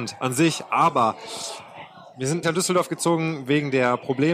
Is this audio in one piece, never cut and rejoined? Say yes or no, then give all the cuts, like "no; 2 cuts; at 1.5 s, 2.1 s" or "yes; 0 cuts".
no; 1 cut; at 2.4 s